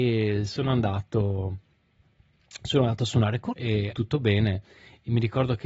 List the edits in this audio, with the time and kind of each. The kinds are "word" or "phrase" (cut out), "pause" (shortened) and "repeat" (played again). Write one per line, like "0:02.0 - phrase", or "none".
0:03.5 - word
0:03.9 - word